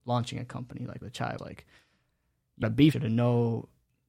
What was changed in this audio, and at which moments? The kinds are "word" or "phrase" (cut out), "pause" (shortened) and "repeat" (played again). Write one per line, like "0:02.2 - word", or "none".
0:01.0 - word
0:01.4 - word
0:02.6 - word
0:02.9 - phrase